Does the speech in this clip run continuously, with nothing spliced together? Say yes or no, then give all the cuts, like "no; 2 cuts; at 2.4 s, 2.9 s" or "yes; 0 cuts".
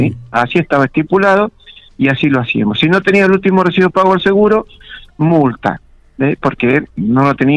yes; 0 cuts